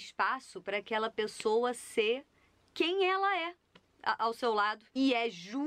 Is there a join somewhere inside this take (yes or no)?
no